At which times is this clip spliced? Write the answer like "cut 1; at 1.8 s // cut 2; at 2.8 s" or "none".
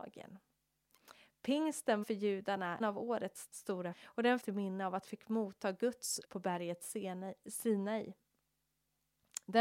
cut 1; at 2.0 s // cut 2; at 2.8 s // cut 3; at 3.5 s // cut 4; at 3.9 s // cut 5; at 4.4 s // cut 6; at 5.0 s // cut 7; at 6.2 s